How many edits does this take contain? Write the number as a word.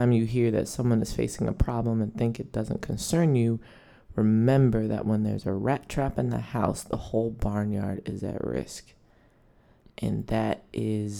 zero